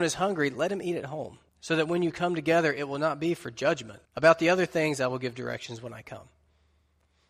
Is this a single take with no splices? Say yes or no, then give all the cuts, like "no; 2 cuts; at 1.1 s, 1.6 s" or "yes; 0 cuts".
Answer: no; 2 cuts; at 1.5 s, 4.1 s